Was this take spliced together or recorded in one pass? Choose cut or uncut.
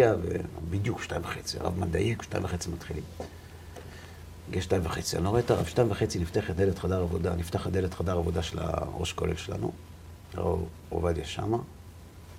cut